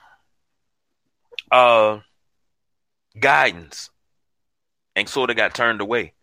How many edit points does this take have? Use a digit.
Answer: 1